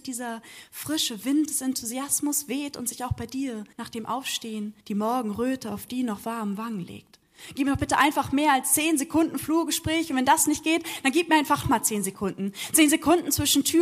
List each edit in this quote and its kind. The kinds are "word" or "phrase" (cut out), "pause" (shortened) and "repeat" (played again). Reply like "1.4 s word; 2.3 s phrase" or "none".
3.7 s pause; 4.8 s pause; 11.6 s word